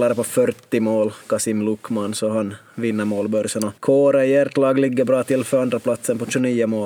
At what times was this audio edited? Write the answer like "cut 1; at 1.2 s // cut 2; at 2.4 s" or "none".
cut 1; at 3.8 s